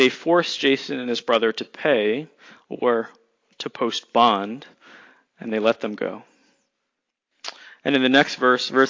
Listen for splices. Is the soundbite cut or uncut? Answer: uncut